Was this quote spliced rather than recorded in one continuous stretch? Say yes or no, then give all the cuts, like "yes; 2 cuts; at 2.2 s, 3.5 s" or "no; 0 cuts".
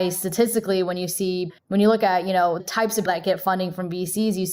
yes; 3 cuts; at 1.6 s, 2.6 s, 3.1 s